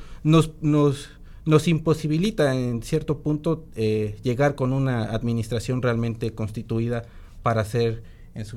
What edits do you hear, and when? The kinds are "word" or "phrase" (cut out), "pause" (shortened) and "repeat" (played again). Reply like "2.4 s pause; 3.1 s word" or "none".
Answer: none